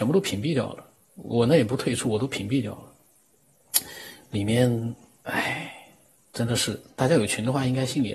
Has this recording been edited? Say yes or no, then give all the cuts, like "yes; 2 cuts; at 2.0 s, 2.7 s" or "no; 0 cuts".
no; 0 cuts